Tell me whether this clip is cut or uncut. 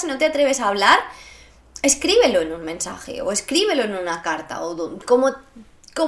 uncut